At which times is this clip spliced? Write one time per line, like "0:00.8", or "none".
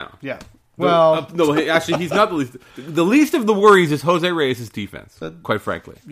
none